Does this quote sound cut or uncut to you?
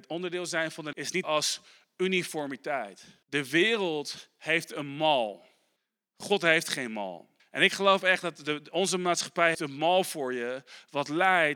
cut